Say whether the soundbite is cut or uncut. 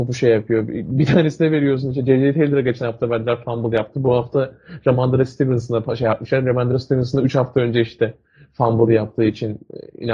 uncut